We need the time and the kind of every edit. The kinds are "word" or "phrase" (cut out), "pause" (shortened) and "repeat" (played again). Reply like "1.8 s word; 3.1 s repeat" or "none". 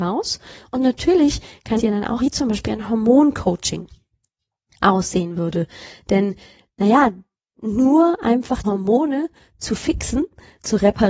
1.8 s word; 2.2 s word; 8.6 s word